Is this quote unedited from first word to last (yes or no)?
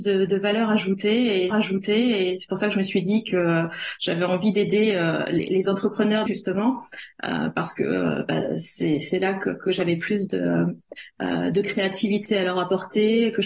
no